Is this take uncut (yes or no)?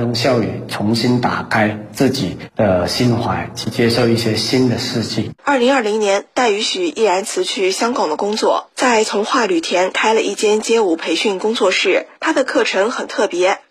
no